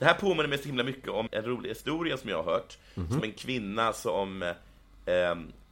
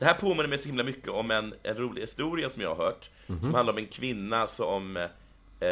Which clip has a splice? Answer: first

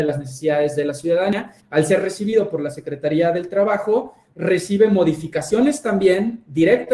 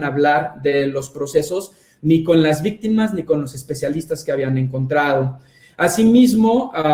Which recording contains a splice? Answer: first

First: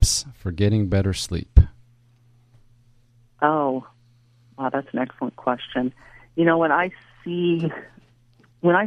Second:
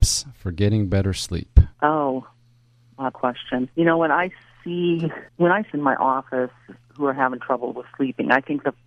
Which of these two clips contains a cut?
second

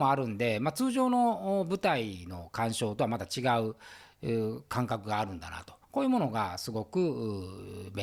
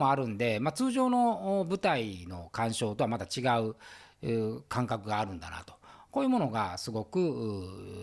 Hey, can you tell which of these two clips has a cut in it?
first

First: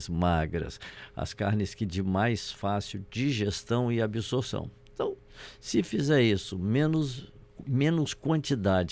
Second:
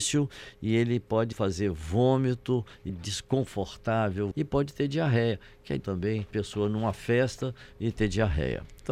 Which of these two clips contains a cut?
second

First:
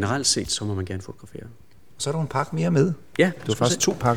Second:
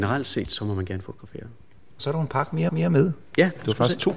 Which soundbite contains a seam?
second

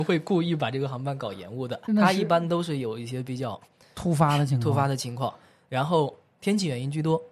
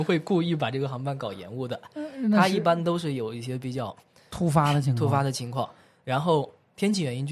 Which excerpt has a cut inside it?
first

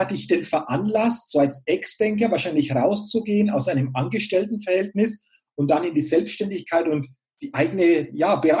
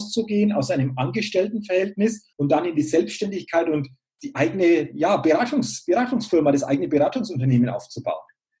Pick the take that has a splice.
second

